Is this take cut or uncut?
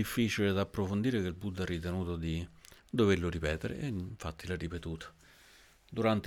cut